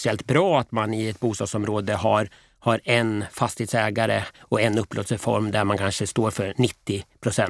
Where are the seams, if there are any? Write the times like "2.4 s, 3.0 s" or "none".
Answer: none